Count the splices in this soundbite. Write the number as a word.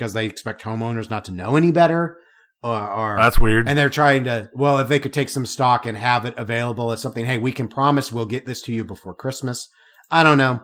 zero